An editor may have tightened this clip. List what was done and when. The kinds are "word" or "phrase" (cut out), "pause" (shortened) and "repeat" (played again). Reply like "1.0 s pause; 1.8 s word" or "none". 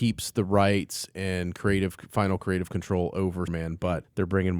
3.5 s word

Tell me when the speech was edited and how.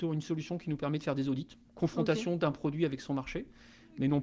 none

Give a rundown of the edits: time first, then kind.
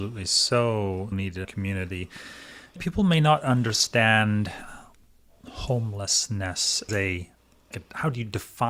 1.1 s word; 1.4 s word; 2.8 s word; 6.9 s word; 7.7 s word

